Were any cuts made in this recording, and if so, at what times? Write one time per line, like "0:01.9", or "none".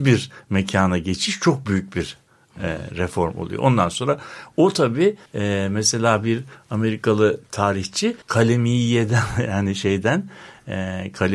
0:05.3
0:08.2